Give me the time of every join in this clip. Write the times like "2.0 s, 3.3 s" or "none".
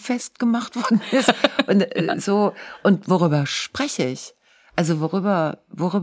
none